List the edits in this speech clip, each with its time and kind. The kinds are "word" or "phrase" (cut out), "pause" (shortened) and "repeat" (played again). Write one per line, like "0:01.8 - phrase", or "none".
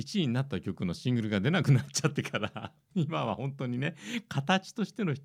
0:02.8 - pause